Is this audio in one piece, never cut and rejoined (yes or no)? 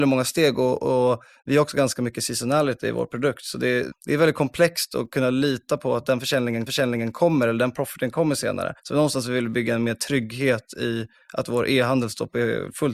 no